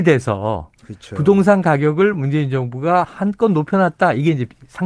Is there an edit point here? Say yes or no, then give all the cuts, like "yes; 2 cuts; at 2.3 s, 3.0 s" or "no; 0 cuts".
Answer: no; 0 cuts